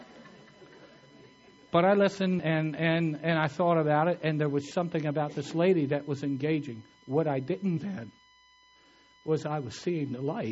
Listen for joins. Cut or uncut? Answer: cut